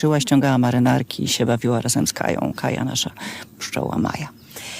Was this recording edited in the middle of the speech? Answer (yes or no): no